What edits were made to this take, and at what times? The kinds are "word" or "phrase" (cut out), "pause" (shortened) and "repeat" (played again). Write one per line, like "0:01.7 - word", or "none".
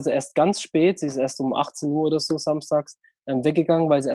none